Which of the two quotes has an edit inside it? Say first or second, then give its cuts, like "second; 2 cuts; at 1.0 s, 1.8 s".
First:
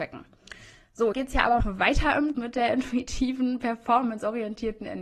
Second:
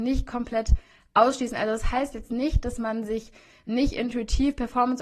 first; 3 cuts; at 1.1 s, 1.6 s, 2.3 s